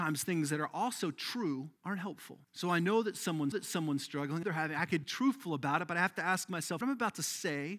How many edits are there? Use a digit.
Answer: 6